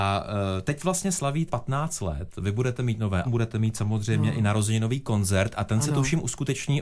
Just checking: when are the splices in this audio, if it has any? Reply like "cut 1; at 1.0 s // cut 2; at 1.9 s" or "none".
cut 1; at 1.5 s // cut 2; at 3.2 s